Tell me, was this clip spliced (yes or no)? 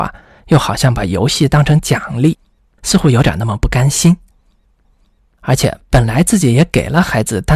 no